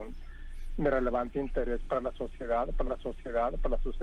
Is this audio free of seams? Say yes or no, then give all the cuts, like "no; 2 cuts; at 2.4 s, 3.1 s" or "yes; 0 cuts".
no; 1 cut; at 2.8 s